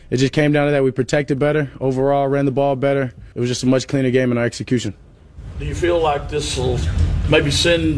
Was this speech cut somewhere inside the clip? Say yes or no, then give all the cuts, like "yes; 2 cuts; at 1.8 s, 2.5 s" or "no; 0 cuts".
yes; 1 cut; at 3.3 s